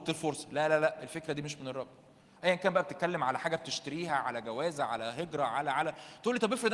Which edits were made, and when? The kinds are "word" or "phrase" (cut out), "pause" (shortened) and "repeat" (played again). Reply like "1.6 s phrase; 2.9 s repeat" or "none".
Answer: none

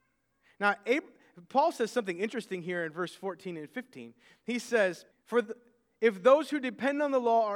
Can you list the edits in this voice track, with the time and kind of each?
5.1 s pause

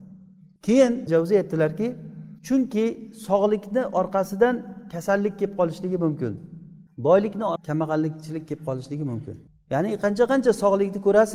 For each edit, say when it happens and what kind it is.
1.1 s word; 2.4 s pause; 7.6 s word; 9.5 s pause

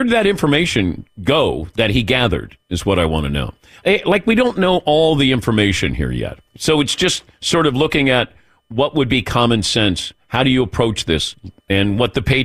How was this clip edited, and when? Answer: 6.5 s pause

